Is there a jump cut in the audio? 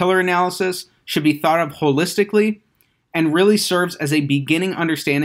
no; 0 cuts

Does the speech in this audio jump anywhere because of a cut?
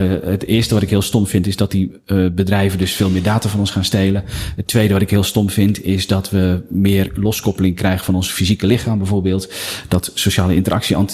no; 0 cuts

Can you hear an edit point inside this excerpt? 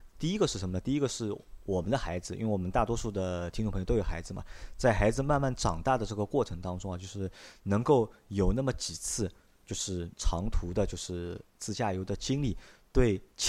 yes; 1 cut; at 10.1 s

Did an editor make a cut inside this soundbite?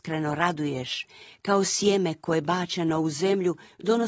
no; 0 cuts

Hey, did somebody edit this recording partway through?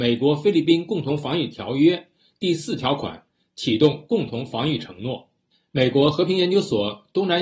no; 0 cuts

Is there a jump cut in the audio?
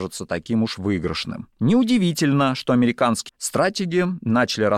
yes; 2 cuts; at 1.5 s, 3.3 s

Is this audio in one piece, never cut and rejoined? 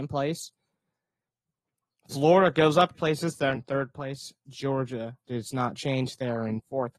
no; 2 cuts; at 2.9 s, 3.6 s

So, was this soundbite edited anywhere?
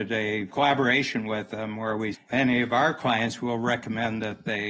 yes; 1 cut; at 2.1 s

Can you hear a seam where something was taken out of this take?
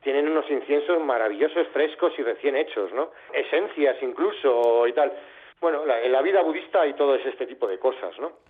no; 0 cuts

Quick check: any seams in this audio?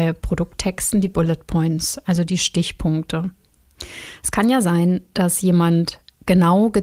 no; 0 cuts

